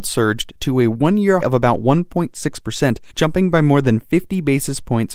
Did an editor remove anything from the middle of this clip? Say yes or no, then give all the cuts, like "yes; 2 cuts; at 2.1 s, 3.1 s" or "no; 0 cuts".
yes; 2 cuts; at 1.4 s, 3.1 s